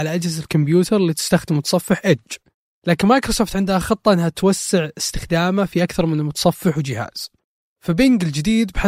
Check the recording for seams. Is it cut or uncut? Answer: uncut